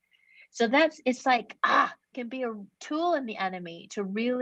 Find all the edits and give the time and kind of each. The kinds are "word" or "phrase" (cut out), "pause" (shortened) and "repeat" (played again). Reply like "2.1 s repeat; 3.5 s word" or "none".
2.1 s word